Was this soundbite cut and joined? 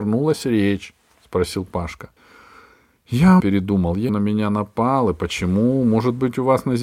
yes; 3 cuts; at 2.2 s, 3.4 s, 4.1 s

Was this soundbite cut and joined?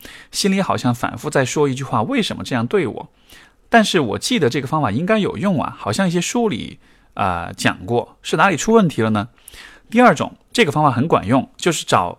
no; 0 cuts

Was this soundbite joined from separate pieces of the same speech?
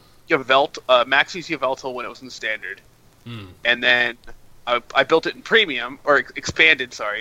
no; 0 cuts

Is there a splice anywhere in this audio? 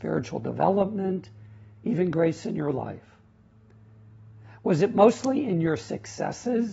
no; 0 cuts

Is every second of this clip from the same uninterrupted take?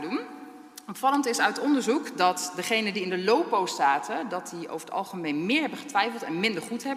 yes; 0 cuts

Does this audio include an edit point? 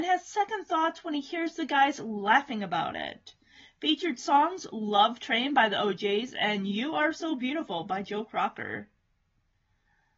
no; 0 cuts

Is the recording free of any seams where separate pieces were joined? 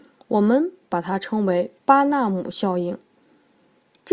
no; 1 cut; at 1.8 s

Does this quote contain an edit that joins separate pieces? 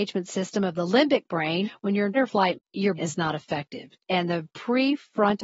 yes; 3 cuts; at 2.1 s, 2.5 s, 3.0 s

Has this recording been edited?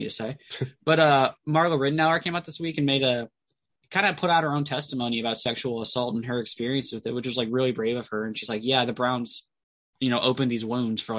no; 0 cuts

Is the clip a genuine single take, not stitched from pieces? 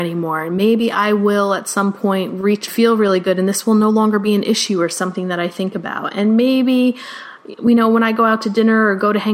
no; 1 cut; at 2.7 s

